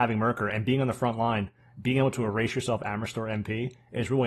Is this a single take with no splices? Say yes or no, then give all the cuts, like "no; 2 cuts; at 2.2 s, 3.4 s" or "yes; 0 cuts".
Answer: yes; 0 cuts